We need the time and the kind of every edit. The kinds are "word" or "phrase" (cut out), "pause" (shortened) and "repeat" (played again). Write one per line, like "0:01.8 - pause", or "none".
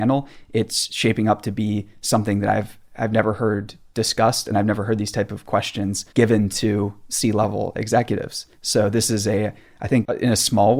0:06.1 - pause